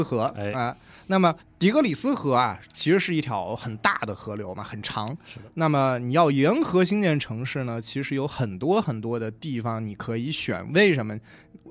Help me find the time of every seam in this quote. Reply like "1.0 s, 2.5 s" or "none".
1.4 s